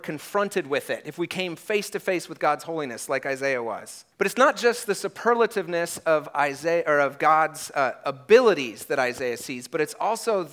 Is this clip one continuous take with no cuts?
no; 1 cut; at 4.1 s

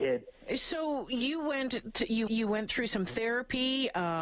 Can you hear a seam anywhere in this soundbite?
yes; 1 cut; at 2.3 s

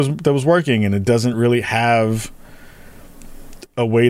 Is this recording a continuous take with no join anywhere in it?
yes; 0 cuts

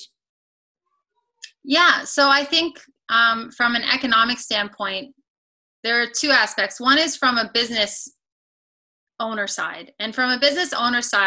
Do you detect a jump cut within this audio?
no; 0 cuts

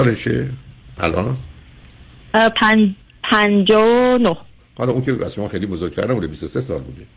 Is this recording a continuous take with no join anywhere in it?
no; 1 cut; at 4.6 s

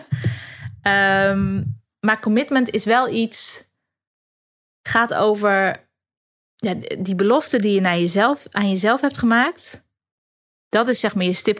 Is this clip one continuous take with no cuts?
yes; 0 cuts

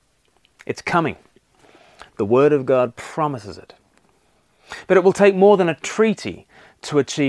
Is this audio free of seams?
yes; 0 cuts

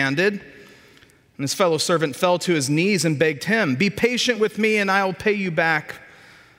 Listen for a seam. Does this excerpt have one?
no; 0 cuts

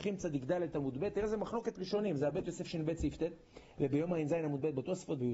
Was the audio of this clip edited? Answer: no; 0 cuts

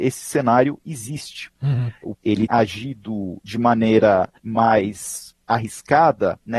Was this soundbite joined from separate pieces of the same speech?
yes; 3 cuts; at 2.1 s, 2.5 s, 4.4 s

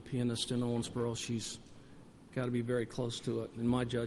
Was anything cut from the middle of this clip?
no; 0 cuts

